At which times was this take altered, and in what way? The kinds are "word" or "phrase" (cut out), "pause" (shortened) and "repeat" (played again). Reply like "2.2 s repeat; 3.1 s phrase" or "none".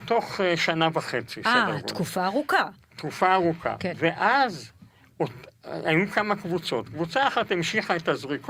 none